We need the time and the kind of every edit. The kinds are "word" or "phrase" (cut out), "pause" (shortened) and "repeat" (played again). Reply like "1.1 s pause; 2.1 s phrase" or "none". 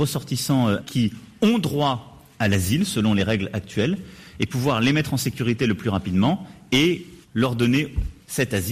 7.2 s pause